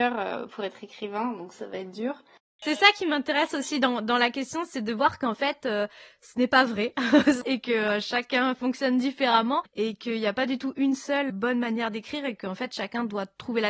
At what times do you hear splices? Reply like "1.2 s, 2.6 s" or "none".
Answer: 2.4 s, 11.3 s